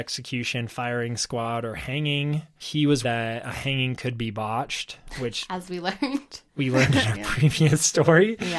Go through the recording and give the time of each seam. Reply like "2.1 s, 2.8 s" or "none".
2.6 s, 3.0 s